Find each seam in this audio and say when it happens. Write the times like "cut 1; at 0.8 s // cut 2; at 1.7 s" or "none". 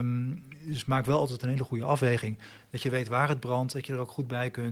none